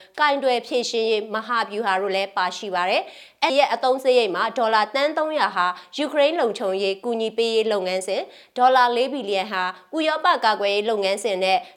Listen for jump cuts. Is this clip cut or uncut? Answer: cut